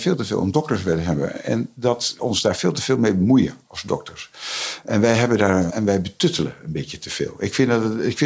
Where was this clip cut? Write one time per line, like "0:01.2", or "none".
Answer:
0:02.2
0:05.7